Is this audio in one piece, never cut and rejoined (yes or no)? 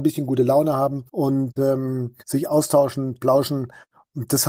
no